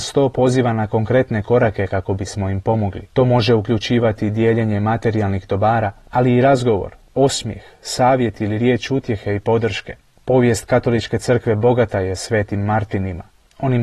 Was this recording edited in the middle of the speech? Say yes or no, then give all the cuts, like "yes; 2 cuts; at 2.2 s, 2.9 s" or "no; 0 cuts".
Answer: yes; 1 cut; at 3.1 s